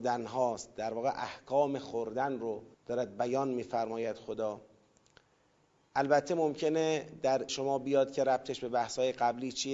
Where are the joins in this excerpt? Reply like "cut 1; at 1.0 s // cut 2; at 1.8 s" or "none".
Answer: cut 1; at 2.7 s // cut 2; at 7.5 s